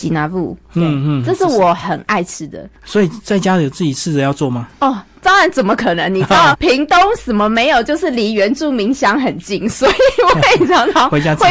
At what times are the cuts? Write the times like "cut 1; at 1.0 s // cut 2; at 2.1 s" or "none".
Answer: cut 1; at 2.8 s // cut 2; at 6.5 s